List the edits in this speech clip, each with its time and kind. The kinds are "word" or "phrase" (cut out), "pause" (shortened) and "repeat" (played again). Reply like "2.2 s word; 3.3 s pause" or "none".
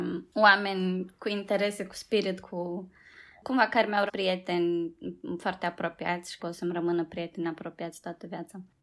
1.9 s word; 2.4 s word; 4.1 s word; 6.4 s word